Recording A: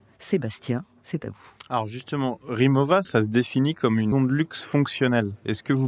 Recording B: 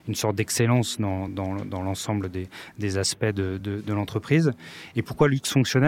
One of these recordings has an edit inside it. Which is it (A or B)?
A